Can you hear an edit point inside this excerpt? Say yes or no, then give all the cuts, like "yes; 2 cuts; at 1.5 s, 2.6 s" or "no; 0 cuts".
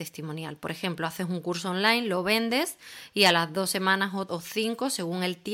yes; 1 cut; at 4.3 s